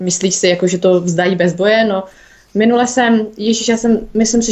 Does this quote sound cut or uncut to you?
uncut